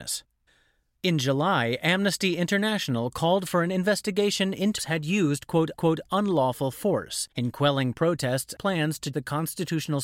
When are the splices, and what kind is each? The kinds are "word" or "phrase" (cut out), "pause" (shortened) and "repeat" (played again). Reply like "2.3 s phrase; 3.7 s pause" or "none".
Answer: 4.8 s phrase; 5.7 s repeat; 7.3 s pause; 8.6 s word; 9.1 s word